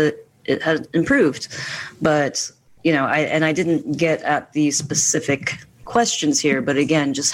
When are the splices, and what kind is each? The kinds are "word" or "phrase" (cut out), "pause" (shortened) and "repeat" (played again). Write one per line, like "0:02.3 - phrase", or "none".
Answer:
none